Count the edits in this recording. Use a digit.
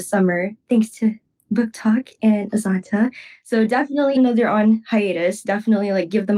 1